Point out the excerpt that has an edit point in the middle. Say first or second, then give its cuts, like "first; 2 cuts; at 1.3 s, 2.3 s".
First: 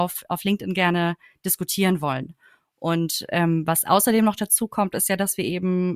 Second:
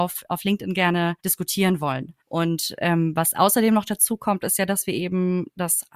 second; 2 cuts; at 1.2 s, 2.2 s